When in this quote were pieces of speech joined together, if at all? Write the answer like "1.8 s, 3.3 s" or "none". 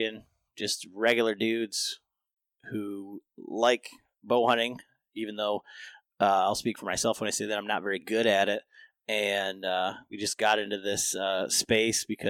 none